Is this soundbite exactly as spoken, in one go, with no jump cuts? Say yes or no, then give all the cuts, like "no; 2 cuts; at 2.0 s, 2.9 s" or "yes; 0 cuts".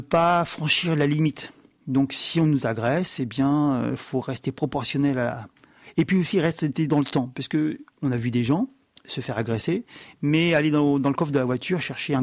yes; 0 cuts